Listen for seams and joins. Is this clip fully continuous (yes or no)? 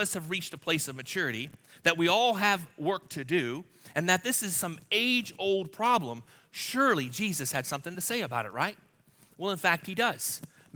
yes